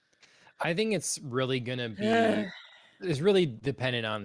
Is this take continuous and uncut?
yes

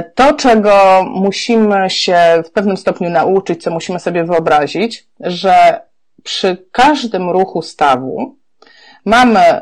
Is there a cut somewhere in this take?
no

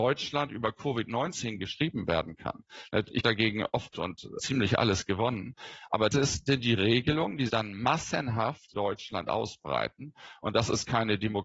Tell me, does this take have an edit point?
yes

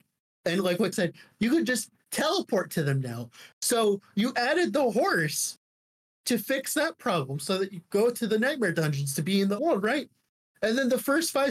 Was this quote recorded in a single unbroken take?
no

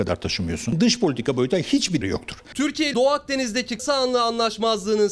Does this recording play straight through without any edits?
no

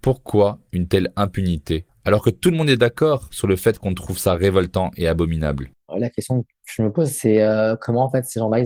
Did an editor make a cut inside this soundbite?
no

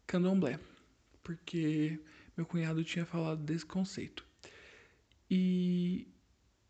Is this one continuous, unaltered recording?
yes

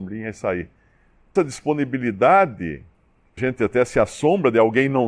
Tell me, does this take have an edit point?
yes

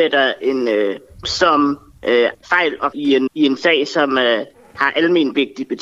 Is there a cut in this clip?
yes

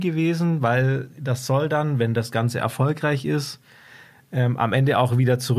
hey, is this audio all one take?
yes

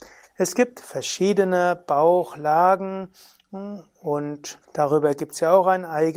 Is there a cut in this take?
yes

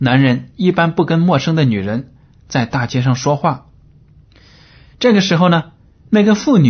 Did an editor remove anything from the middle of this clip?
no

